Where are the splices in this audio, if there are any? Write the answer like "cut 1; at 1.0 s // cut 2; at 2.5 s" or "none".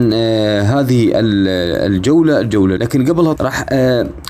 cut 1; at 2.8 s // cut 2; at 3.3 s